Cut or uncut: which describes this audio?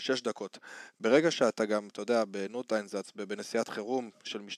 uncut